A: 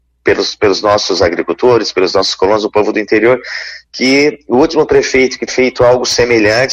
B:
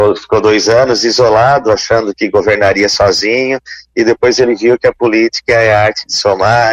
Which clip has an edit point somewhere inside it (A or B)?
A